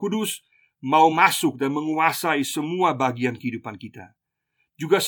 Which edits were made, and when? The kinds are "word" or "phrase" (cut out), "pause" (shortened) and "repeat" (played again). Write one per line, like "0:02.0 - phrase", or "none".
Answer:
none